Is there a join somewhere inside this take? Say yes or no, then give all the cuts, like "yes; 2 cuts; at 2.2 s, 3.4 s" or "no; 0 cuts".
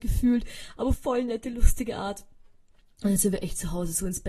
yes; 1 cut; at 0.9 s